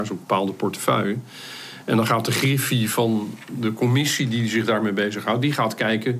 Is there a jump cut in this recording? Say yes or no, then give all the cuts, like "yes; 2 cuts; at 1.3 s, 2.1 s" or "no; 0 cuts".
no; 0 cuts